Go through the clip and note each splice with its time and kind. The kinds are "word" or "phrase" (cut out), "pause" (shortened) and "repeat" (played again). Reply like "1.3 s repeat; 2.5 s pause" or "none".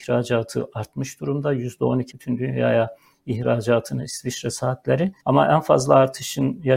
2.1 s word; 5.2 s pause